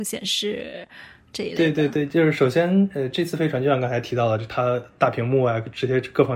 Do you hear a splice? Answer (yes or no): no